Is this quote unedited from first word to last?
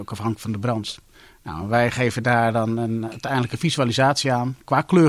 yes; 0 cuts

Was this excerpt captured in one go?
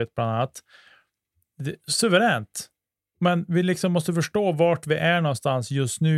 no; 1 cut; at 3.0 s

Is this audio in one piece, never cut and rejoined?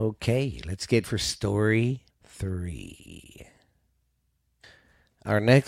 no; 2 cuts; at 1.0 s, 2.1 s

